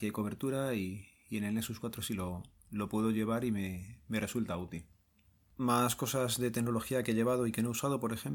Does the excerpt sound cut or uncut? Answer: uncut